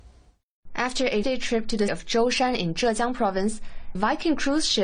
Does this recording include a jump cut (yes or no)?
yes